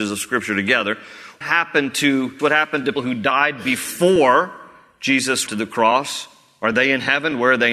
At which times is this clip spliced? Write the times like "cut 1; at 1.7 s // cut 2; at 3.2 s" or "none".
cut 1; at 1.4 s // cut 2; at 2.4 s // cut 3; at 3.0 s // cut 4; at 5.5 s